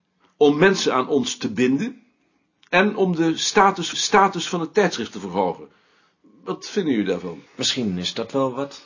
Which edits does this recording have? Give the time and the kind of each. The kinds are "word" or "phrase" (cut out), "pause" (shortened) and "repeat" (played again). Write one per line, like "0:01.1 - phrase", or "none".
0:03.9 - repeat
0:07.5 - pause